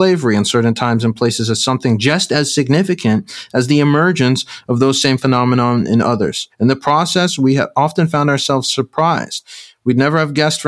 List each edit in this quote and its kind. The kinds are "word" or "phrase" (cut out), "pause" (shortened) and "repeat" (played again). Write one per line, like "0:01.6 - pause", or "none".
0:06.5 - pause